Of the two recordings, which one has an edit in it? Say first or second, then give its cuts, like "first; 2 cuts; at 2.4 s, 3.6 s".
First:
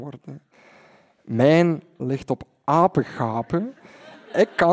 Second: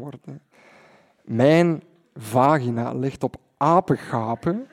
first; 1 cut; at 2.0 s